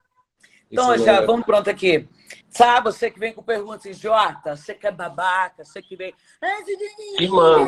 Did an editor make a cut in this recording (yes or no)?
yes